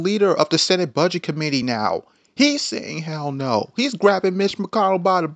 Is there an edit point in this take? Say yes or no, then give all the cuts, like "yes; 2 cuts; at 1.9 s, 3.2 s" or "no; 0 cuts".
no; 0 cuts